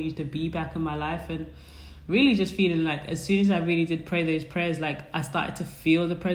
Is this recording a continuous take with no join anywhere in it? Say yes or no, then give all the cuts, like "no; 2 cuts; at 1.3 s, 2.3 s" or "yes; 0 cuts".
yes; 0 cuts